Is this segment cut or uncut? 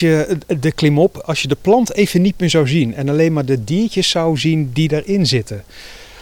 uncut